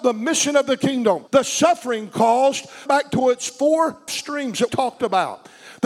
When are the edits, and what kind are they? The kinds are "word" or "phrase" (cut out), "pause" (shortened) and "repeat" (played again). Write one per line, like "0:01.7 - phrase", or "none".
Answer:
0:01.3 - pause
0:02.9 - phrase
0:04.1 - word
0:04.7 - word